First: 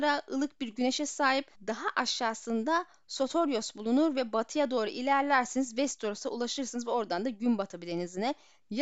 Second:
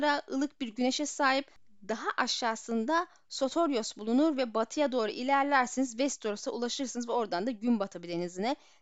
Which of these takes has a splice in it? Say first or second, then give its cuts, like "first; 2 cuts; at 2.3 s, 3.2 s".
first; 1 cut; at 1.5 s